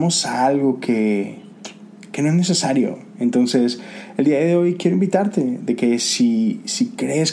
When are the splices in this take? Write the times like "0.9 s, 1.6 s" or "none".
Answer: none